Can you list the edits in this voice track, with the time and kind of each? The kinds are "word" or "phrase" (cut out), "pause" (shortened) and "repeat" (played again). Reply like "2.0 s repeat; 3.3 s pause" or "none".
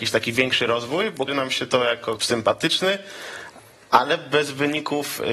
1.3 s word; 2.2 s word